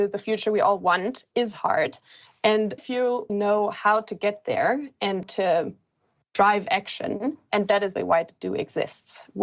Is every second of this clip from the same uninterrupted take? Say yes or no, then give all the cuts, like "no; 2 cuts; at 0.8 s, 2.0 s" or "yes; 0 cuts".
no; 4 cuts; at 2.8 s, 3.3 s, 5.2 s, 8.0 s